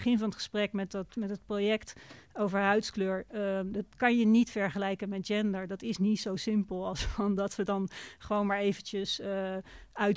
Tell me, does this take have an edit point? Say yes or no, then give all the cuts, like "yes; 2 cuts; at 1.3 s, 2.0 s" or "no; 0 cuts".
no; 0 cuts